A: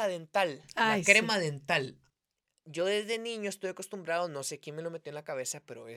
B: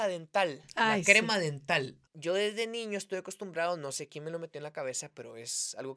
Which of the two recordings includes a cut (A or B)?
B